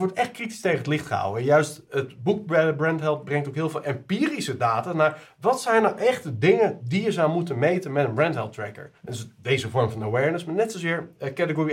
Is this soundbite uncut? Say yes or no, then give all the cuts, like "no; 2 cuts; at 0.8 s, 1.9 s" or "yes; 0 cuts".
no; 1 cut; at 9.0 s